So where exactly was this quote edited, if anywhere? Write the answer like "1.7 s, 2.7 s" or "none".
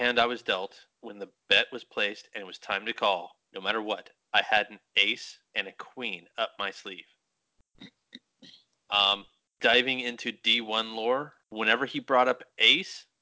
0.9 s, 3.4 s, 5.5 s, 9.5 s, 11.4 s